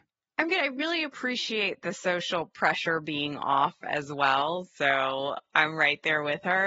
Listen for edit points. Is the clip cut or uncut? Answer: uncut